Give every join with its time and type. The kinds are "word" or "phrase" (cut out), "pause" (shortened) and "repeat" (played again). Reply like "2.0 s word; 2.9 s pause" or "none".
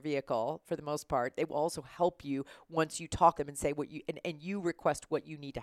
3.3 s phrase